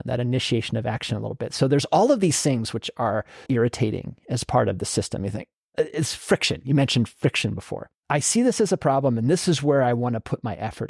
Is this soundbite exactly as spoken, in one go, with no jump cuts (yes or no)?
no